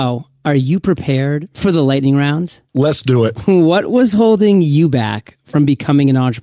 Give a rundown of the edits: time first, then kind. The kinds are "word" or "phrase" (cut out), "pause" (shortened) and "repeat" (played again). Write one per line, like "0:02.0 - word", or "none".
0:02.7 - pause

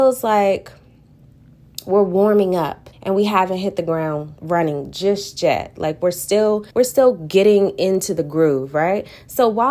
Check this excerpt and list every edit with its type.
0:02.9 - pause
0:04.4 - pause
0:06.7 - pause

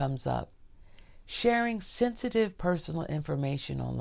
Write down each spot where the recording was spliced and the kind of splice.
none

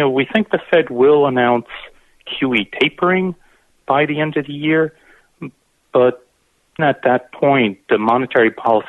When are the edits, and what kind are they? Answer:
0:06.8 - word

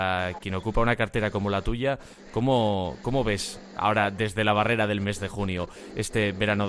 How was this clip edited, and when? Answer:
none

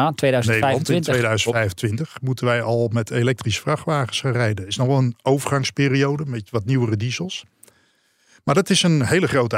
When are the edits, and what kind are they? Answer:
none

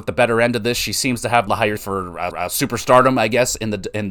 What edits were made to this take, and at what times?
0:01.5 - phrase
0:01.8 - word
0:02.3 - repeat

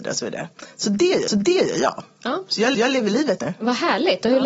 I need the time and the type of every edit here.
0:01.3 - repeat
0:02.7 - repeat
0:03.4 - word

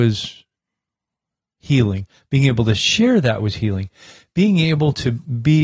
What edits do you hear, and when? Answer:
none

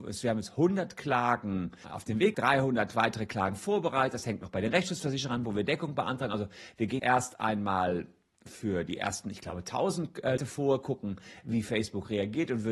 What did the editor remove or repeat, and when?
0:01.8 - word
0:02.3 - word
0:07.0 - word
0:10.4 - word

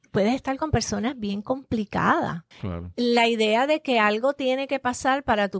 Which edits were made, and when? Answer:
0:02.5 - pause

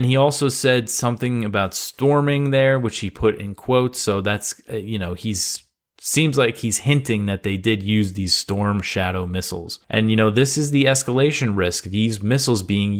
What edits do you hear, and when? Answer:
0:09.8 - pause

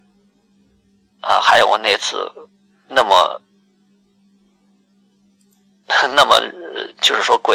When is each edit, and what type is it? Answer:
none

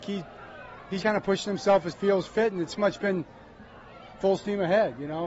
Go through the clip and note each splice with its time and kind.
0:01.0 - word
0:01.9 - word
0:02.8 - word
0:04.2 - word

